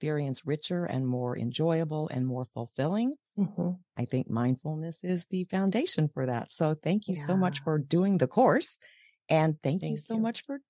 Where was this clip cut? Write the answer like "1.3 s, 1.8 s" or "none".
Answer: none